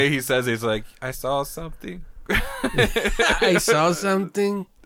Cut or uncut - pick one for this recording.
uncut